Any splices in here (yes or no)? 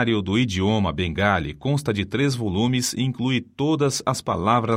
no